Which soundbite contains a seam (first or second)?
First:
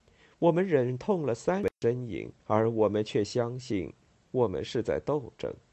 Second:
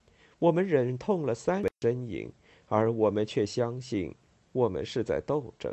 first